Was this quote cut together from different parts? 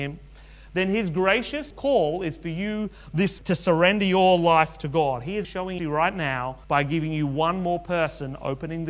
yes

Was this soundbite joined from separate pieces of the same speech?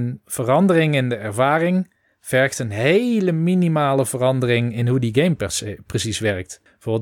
no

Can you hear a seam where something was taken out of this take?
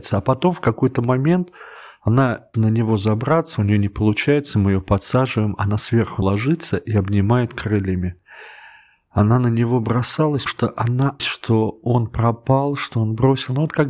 yes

